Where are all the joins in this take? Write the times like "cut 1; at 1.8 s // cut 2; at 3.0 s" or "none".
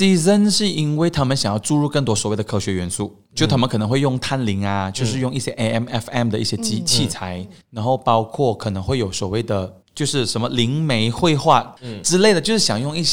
cut 1; at 7.6 s // cut 2; at 9.8 s